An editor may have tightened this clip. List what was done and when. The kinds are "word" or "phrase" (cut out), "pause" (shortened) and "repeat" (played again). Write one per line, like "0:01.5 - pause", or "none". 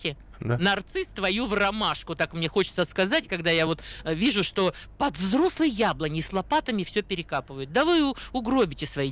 none